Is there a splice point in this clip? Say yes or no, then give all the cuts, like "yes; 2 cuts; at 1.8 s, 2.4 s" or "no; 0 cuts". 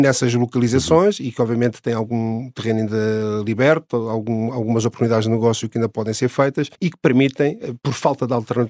yes; 1 cut; at 6.7 s